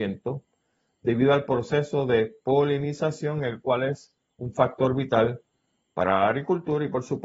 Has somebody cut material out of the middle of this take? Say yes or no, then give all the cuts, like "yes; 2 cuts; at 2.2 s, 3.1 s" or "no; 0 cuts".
no; 0 cuts